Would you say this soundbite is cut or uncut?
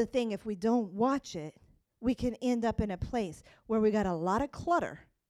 uncut